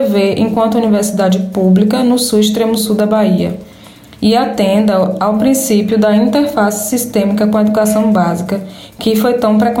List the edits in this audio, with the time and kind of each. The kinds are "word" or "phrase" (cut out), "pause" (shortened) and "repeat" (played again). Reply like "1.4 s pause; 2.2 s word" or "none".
none